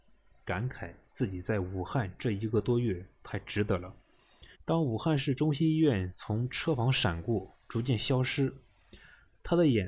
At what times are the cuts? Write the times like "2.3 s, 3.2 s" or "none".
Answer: 4.5 s